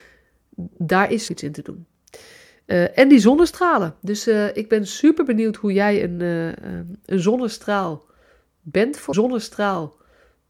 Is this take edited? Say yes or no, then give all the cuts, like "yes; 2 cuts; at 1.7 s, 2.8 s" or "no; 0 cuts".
yes; 2 cuts; at 1.3 s, 9.1 s